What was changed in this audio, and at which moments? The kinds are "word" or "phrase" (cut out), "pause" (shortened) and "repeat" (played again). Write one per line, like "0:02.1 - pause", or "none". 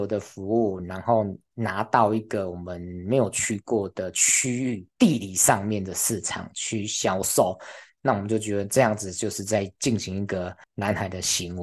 0:04.9 - pause
0:10.6 - pause